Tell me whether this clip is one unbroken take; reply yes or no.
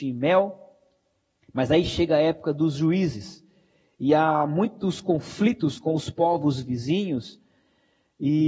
yes